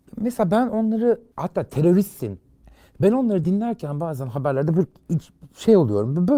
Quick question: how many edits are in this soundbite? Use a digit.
0